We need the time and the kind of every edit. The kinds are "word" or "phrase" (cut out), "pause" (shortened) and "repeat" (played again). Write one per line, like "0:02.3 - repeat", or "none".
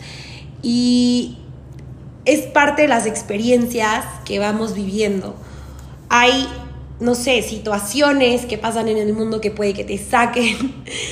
none